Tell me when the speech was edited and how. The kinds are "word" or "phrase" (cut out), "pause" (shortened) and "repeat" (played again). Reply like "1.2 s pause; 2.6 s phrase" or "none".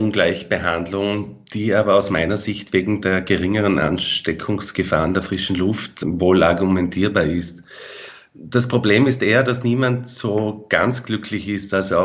none

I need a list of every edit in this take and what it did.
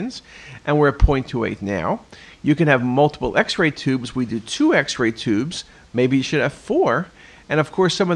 none

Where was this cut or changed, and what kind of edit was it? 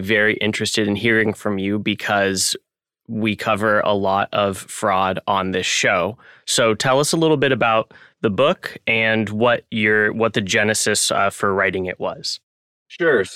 none

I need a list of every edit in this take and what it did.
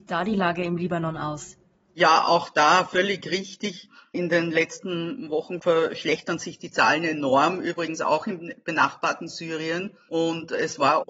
none

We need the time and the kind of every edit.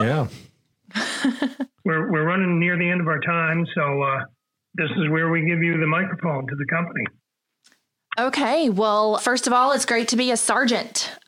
4.5 s pause; 9.2 s word

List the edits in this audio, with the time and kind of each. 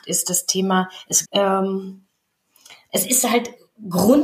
1.3 s phrase

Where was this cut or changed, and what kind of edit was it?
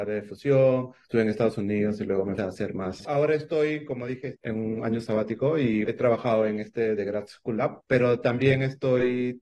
2.4 s phrase; 3.0 s phrase; 5.8 s word

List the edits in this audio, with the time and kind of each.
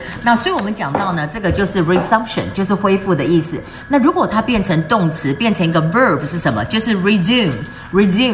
none

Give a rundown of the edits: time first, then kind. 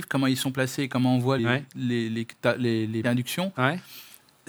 1.4 s word; 3.0 s word

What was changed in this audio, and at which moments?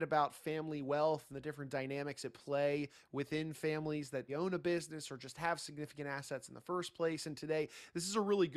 4.3 s word

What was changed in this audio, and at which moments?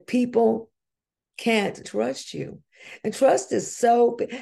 1.8 s phrase

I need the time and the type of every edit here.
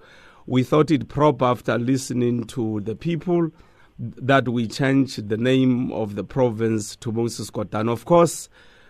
none

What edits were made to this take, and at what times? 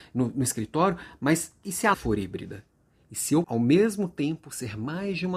1.9 s phrase; 3.4 s word

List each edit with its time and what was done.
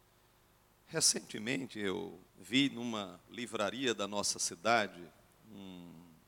2.3 s pause

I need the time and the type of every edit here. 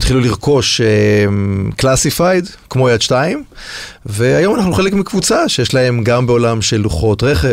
none

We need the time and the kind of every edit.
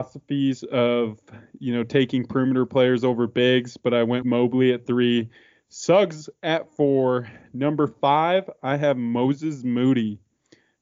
4.2 s word

